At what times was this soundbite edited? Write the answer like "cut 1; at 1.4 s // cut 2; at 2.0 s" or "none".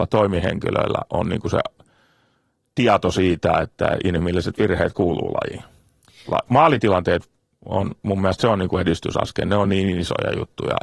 none